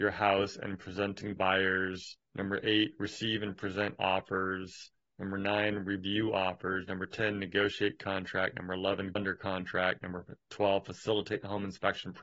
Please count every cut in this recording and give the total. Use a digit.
3